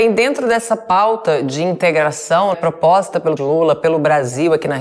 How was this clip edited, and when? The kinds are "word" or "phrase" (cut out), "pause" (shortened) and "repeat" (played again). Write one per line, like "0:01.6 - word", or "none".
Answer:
0:02.5 - word
0:03.4 - word